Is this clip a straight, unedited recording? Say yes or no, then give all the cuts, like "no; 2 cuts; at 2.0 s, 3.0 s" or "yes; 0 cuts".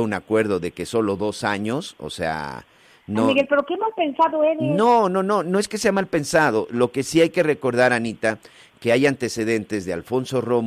yes; 0 cuts